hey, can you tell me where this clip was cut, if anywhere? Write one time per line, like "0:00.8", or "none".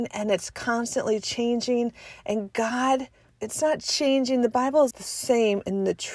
0:03.3
0:04.9